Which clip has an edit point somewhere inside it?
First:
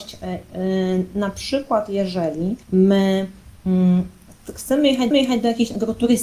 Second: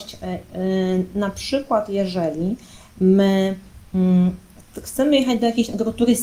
first; 2 cuts; at 2.6 s, 5.1 s

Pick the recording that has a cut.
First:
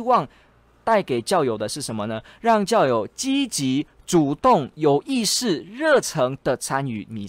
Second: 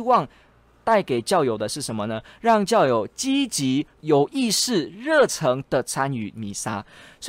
second; 1 cut; at 4.0 s

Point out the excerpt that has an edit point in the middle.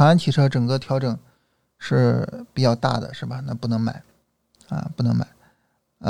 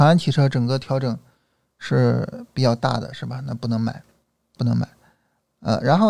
second; 1 cut; at 4.6 s

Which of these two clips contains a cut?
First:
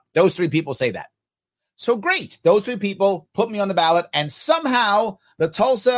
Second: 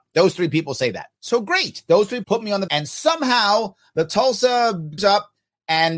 second; 4 cuts; at 1.2 s, 2.2 s, 2.7 s, 5.0 s

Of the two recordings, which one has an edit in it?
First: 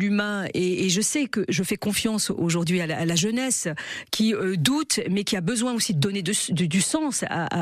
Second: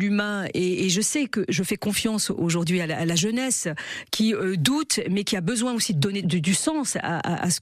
second; 1 cut; at 6.2 s

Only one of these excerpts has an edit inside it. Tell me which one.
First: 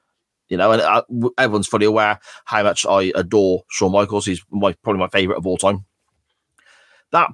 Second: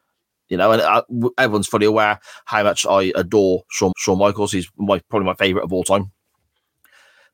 second; 1 cut; at 3.9 s

